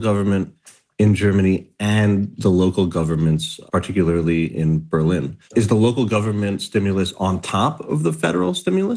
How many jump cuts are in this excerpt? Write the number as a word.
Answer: one